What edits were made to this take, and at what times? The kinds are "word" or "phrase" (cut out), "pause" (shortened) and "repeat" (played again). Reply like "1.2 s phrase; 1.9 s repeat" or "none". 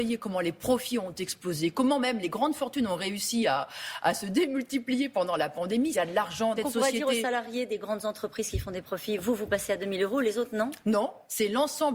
5.9 s phrase; 6.6 s phrase